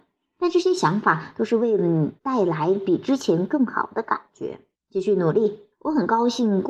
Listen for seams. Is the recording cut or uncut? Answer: cut